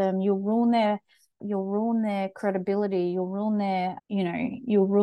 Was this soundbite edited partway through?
no; 0 cuts

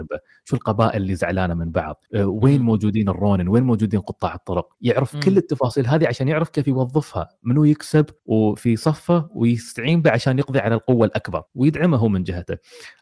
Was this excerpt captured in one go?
no; 4 cuts; at 2.1 s, 4.7 s, 8.2 s, 11.5 s

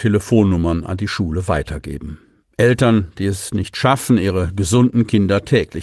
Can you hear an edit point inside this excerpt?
no; 0 cuts

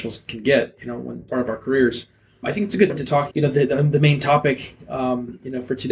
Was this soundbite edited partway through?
yes; 4 cuts; at 1.3 s, 2.4 s, 2.9 s, 3.3 s

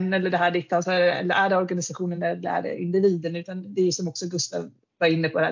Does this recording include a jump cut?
no; 0 cuts

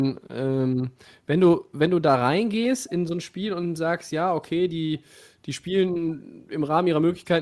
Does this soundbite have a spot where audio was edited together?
no; 0 cuts

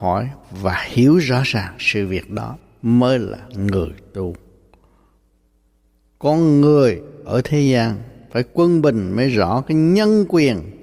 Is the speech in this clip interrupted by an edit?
no; 0 cuts

